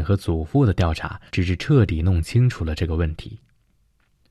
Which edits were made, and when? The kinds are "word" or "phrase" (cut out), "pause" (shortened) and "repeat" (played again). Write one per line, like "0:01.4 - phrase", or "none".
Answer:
0:01.3 - pause